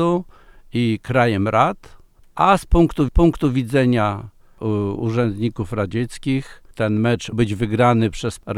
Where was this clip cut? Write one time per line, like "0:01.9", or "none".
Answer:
0:02.2
0:03.1
0:06.7
0:07.3

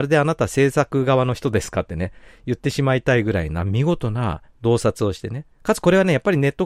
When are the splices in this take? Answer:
0:04.5
0:05.5

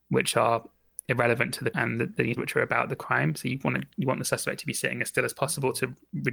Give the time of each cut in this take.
0:01.7
0:02.4

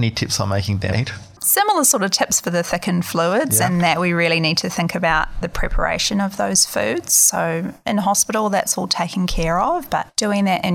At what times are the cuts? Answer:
0:00.9
0:05.4

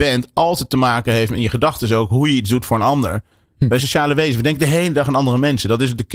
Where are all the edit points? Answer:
0:03.8

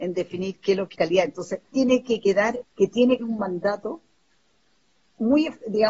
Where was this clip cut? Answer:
0:00.9
0:01.7
0:02.6
0:03.2

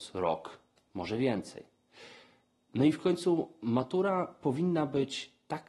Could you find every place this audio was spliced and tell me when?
none

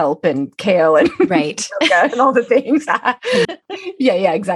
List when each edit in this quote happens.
0:03.4

